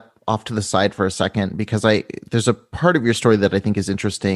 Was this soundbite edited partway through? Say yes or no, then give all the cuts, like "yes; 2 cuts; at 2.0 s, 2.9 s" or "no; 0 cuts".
no; 0 cuts